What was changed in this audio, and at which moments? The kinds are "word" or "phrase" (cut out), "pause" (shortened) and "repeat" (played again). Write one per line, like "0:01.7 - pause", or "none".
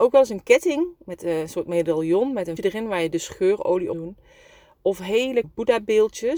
0:02.6 - word
0:03.9 - phrase
0:05.4 - word